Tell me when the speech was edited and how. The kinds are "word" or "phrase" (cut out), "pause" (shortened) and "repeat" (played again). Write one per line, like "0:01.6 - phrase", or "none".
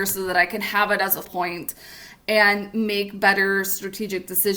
0:01.2 - word